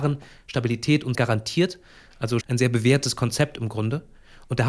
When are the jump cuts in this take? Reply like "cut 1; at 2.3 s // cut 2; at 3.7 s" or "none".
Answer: cut 1; at 1.1 s // cut 2; at 2.4 s